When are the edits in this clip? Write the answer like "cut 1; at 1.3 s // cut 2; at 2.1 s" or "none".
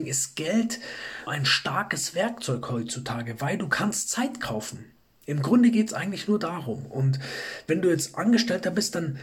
cut 1; at 1.3 s